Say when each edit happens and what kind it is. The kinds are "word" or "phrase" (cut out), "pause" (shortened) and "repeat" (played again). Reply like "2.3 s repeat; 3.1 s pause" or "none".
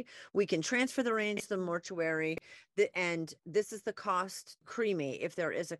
4.6 s word